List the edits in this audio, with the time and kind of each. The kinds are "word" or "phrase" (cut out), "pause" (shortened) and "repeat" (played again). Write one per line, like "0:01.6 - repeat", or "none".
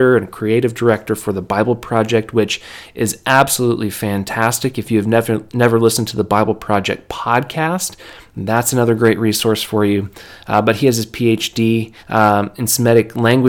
0:12.0 - pause